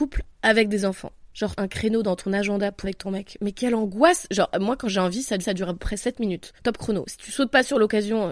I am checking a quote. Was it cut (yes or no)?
yes